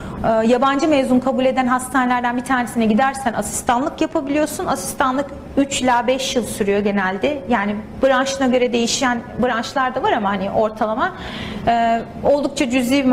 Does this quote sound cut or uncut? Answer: uncut